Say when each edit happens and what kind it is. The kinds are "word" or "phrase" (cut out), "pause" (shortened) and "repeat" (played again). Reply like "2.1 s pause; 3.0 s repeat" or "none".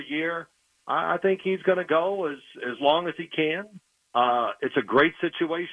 none